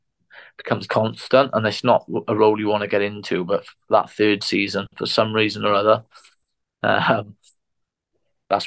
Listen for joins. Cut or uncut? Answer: uncut